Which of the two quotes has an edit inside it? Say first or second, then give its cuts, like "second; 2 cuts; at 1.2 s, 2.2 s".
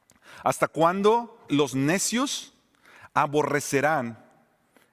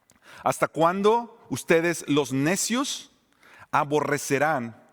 first; 1 cut; at 1.5 s